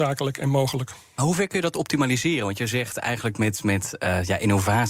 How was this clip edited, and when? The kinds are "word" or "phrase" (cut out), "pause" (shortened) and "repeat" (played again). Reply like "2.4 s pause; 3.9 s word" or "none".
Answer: none